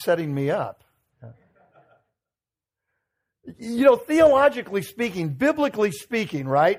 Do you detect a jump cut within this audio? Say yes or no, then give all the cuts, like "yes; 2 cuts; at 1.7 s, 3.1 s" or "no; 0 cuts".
no; 0 cuts